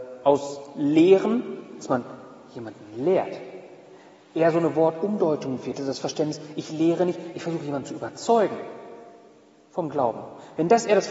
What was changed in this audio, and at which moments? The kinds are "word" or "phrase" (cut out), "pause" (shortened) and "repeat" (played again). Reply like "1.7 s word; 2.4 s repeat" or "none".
none

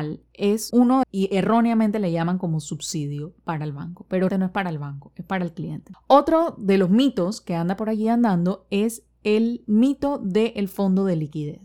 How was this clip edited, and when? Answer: 1.0 s phrase; 4.3 s word

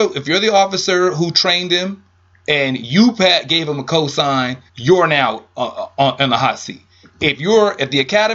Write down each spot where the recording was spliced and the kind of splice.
4.7 s pause

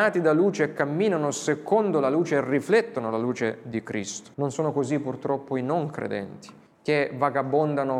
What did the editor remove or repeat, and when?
4.3 s pause; 6.7 s pause

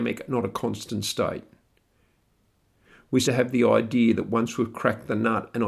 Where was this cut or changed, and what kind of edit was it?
3.2 s word

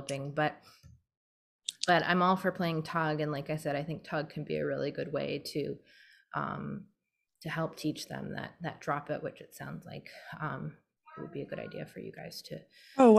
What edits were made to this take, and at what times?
none

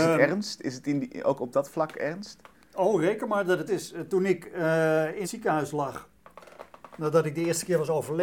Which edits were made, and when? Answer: 3.7 s word; 5.2 s word

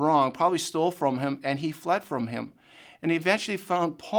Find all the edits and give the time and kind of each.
none

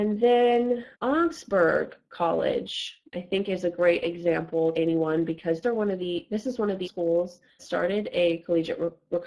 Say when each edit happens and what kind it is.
0.9 s pause; 3.1 s pause; 4.7 s word; 5.6 s word; 6.8 s word; 7.6 s word

